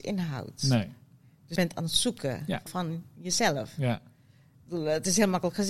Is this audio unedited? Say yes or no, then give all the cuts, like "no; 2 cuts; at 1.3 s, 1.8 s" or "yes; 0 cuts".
no; 2 cuts; at 1.6 s, 2.7 s